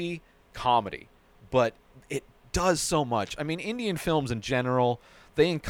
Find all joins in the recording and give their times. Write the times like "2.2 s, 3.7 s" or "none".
none